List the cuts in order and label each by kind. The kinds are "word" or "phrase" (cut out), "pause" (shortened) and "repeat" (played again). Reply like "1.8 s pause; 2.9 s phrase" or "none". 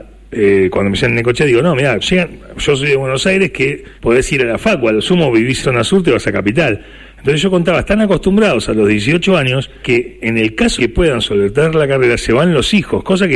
2.0 s word; 4.0 s pause; 5.6 s word; 9.8 s word; 10.8 s word